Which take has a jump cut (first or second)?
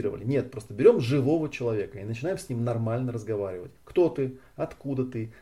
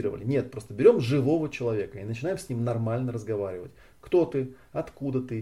first